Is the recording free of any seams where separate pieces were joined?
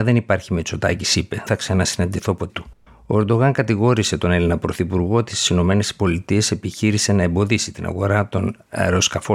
no; 3 cuts; at 1.5 s, 2.5 s, 2.9 s

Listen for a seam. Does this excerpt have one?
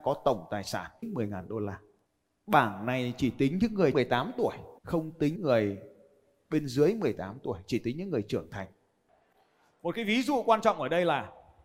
yes; 5 cuts; at 1.0 s, 2.1 s, 3.9 s, 4.8 s, 5.4 s

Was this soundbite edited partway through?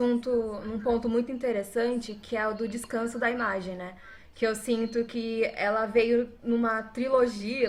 no; 0 cuts

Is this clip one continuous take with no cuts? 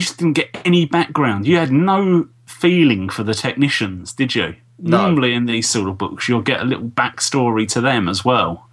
yes; 0 cuts

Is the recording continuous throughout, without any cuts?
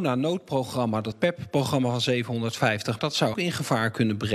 no; 3 cuts; at 1.1 s, 3.0 s, 3.3 s

